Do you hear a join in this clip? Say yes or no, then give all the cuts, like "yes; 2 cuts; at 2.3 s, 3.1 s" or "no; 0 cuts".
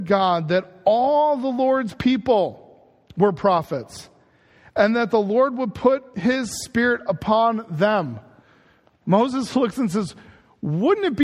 no; 0 cuts